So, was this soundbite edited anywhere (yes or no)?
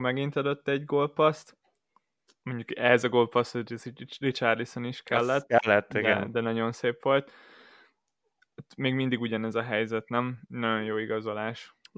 no